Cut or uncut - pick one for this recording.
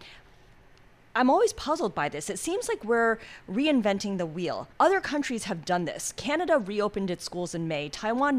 cut